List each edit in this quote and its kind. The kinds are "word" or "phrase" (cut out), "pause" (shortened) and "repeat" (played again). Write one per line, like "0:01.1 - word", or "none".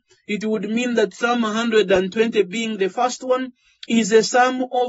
none